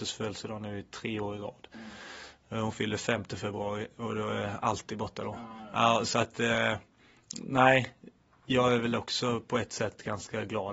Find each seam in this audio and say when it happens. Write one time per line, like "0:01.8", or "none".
none

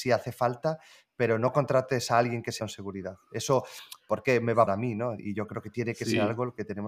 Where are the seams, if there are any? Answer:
0:02.6
0:04.7

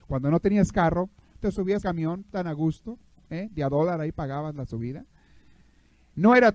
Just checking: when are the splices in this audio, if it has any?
0:01.8

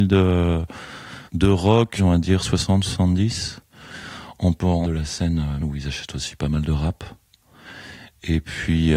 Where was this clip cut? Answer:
0:01.3
0:02.0
0:04.8
0:05.6

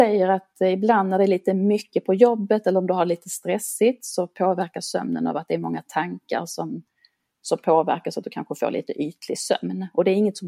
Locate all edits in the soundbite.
none

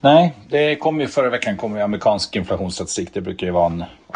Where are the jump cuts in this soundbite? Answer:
none

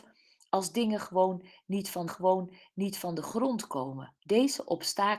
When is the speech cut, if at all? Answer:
0:02.1
0:04.2

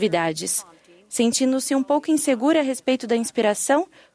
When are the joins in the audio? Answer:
none

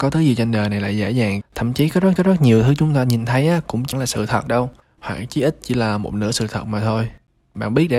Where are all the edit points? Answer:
0:01.4
0:02.2
0:03.9
0:04.8

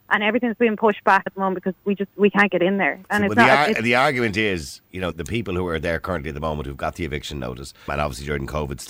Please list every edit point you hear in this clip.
0:01.3
0:05.1
0:07.9

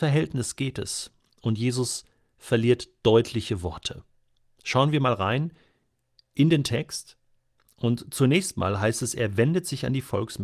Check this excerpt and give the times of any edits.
none

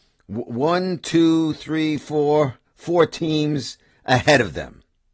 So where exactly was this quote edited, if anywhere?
none

